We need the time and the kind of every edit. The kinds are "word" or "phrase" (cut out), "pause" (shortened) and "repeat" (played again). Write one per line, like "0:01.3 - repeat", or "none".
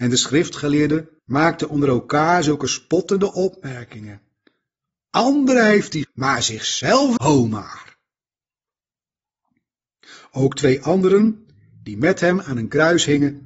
0:01.2 - pause
0:06.0 - word
0:07.2 - word